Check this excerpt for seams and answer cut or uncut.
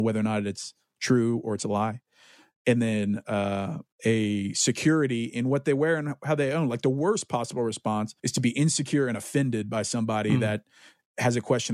cut